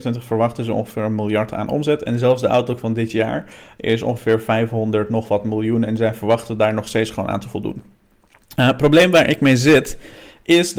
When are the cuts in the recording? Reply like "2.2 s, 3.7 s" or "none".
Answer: none